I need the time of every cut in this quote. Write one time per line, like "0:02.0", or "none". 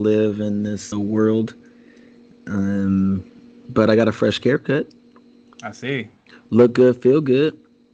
0:00.9